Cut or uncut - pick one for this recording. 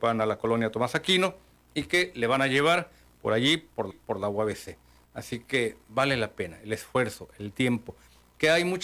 cut